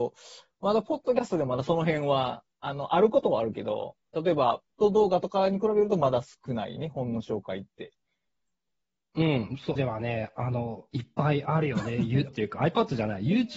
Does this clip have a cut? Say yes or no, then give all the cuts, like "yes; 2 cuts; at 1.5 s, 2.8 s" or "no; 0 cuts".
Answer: yes; 3 cuts; at 4.7 s, 9.8 s, 12.3 s